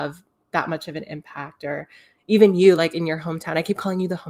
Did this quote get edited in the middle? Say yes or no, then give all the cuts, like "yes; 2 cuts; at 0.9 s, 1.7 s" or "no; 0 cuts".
no; 0 cuts